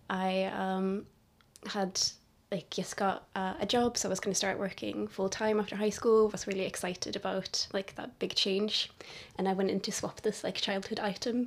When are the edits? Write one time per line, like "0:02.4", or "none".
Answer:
none